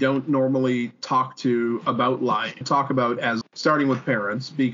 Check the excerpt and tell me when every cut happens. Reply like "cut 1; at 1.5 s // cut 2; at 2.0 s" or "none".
cut 1; at 2.6 s // cut 2; at 3.4 s

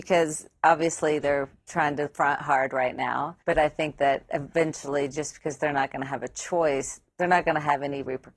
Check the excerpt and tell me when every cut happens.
cut 1; at 3.4 s

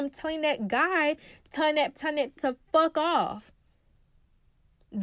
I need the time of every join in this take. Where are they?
cut 1; at 1.9 s // cut 2; at 2.4 s

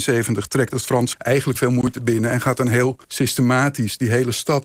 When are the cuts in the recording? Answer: cut 1; at 1.1 s // cut 2; at 1.5 s // cut 3; at 2.0 s // cut 4; at 3.0 s

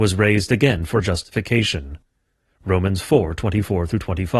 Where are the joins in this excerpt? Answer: cut 1; at 1.0 s

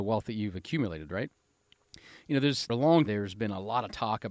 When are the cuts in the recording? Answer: cut 1; at 2.7 s // cut 2; at 3.1 s

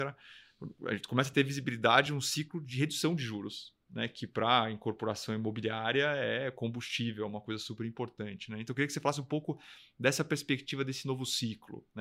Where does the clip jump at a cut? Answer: none

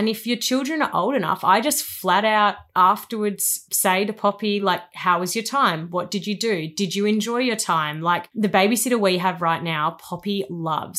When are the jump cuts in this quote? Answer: none

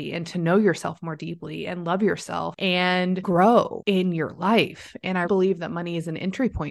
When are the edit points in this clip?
cut 1; at 5.2 s

